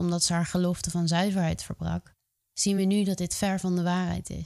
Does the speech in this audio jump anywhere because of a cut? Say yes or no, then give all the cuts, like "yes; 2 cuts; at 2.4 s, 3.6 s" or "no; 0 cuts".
no; 0 cuts